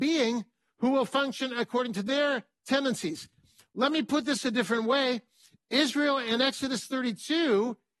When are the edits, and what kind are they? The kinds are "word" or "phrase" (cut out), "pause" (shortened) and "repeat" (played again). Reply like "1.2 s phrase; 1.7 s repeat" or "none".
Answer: none